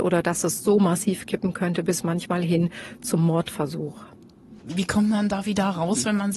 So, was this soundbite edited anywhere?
no; 0 cuts

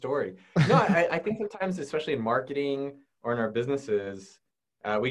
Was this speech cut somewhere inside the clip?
no; 0 cuts

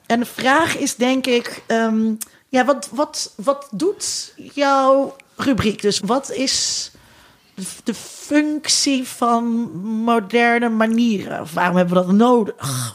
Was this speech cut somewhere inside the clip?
yes; 2 cuts; at 2.3 s, 6.0 s

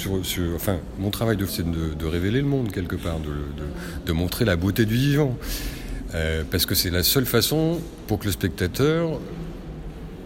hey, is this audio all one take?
no; 2 cuts; at 1.5 s, 8.1 s

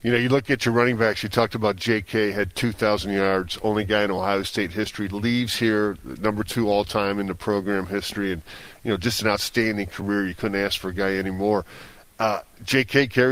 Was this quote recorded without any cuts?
yes; 0 cuts

